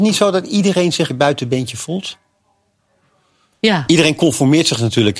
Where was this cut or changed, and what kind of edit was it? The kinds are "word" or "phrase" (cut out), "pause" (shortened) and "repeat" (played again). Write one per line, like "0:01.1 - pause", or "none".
0:01.1 - phrase

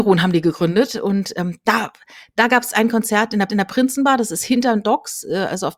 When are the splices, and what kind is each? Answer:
0:03.5 - repeat

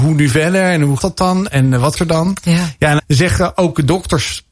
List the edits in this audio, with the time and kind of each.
0:01.0 - word
0:01.9 - word
0:03.0 - word

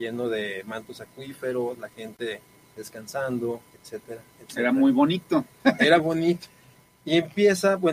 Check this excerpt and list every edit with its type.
0:03.7 - pause
0:06.0 - word

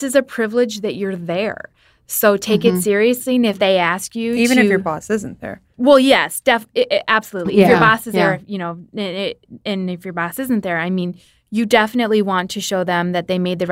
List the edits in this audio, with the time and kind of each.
none

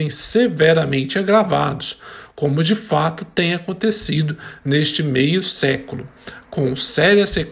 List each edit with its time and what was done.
none

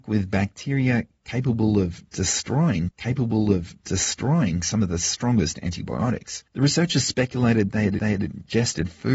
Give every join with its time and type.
0:02.9 - repeat
0:06.5 - pause
0:08.0 - repeat

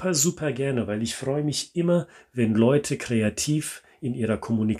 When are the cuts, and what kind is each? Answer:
none

